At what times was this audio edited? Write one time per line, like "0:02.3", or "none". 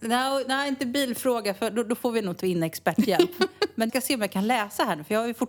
0:02.4
0:03.9